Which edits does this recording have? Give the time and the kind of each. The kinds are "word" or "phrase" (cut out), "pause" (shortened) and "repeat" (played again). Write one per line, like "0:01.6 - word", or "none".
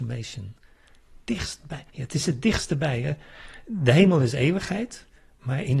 0:01.9 - pause

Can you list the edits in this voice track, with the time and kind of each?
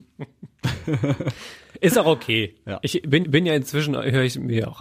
0:03.2 - repeat

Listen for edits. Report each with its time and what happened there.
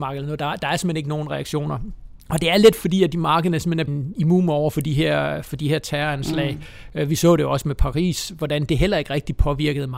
0:02.2 - pause
0:03.9 - word

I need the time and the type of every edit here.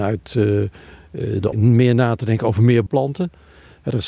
0:01.5 - word
0:02.9 - word

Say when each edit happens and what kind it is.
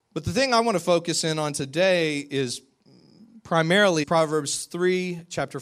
0:04.0 - word

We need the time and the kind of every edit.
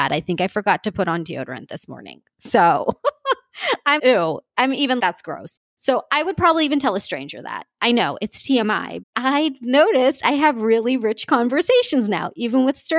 0:04.0 - word
0:05.0 - word
0:09.0 - word

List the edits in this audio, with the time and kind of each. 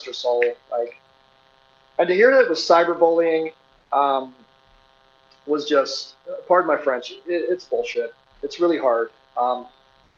none

